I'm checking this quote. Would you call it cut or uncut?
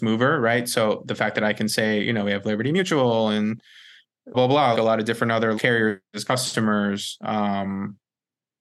cut